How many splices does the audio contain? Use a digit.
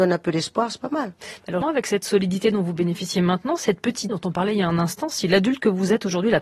2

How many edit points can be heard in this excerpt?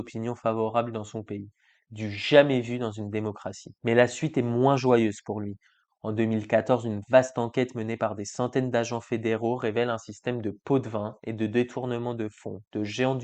1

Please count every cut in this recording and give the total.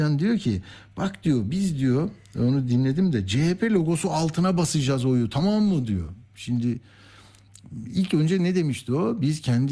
0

